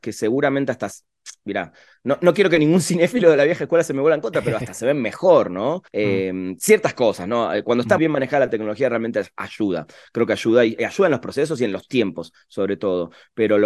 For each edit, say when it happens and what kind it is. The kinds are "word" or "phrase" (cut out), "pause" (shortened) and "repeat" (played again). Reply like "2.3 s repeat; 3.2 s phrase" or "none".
5.9 s pause; 8.0 s word